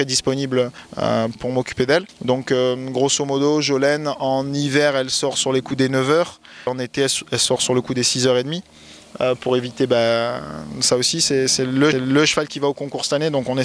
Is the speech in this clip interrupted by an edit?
yes; 3 cuts; at 1.4 s, 6.7 s, 11.9 s

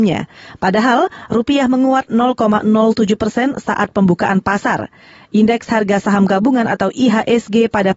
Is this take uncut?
yes; 0 cuts

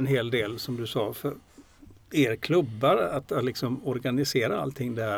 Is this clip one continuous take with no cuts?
yes; 0 cuts

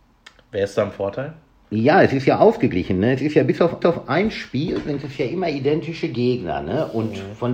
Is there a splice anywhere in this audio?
yes; 1 cut; at 3.8 s

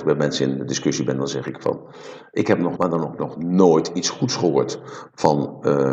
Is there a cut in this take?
yes; 1 cut; at 2.8 s

